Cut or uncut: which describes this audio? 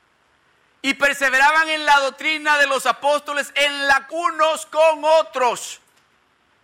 cut